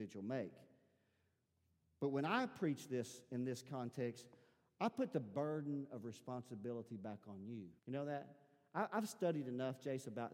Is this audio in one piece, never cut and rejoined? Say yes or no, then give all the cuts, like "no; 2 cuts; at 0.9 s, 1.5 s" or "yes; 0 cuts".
no; 1 cut; at 7.8 s